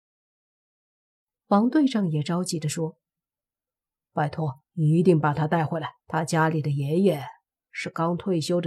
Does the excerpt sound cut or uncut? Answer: cut